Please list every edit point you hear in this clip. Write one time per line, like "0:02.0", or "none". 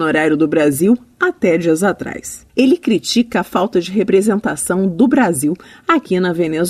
0:02.5